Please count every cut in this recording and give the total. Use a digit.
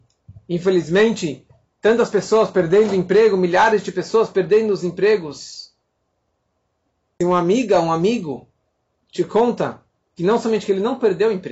0